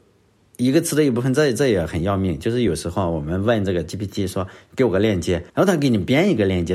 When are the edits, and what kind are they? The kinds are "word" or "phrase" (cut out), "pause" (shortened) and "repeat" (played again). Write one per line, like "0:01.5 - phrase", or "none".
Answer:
0:03.9 - word
0:05.5 - pause